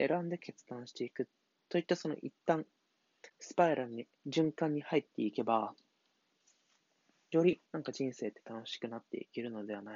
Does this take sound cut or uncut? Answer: cut